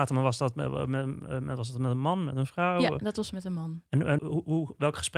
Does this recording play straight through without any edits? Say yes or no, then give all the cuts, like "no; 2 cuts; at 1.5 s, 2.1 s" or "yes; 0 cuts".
no; 1 cut; at 4.2 s